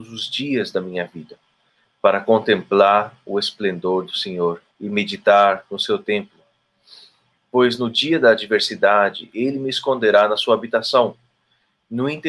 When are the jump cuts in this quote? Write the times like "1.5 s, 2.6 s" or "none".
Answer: 4.7 s